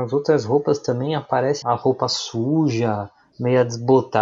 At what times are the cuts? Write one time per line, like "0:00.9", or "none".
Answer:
0:01.6